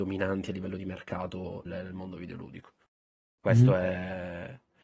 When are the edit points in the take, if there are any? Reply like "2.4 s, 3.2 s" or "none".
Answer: 1.7 s